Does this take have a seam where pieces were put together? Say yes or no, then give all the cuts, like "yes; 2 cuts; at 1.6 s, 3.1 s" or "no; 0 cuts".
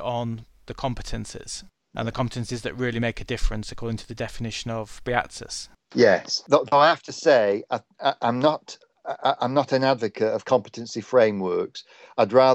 no; 0 cuts